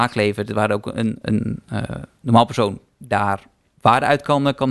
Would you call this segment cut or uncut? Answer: cut